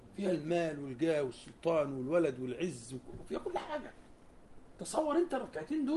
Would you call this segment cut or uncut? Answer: uncut